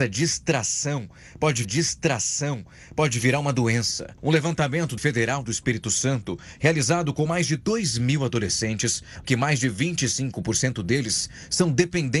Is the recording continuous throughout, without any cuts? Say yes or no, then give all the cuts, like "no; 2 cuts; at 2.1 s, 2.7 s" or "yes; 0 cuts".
no; 3 cuts; at 1.6 s, 5.0 s, 9.2 s